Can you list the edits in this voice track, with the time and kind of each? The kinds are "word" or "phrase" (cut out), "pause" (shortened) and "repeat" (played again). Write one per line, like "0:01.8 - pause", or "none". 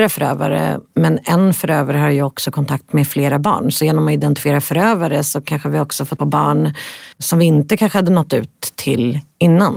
0:06.2 - word
0:07.1 - pause